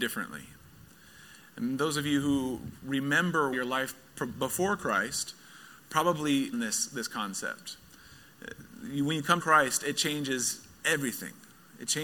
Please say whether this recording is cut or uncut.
cut